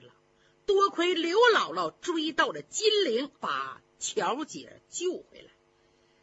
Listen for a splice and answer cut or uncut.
cut